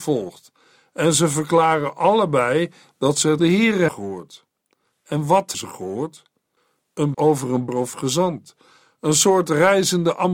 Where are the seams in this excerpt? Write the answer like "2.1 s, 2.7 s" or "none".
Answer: 3.4 s, 3.9 s, 5.5 s, 7.1 s, 7.7 s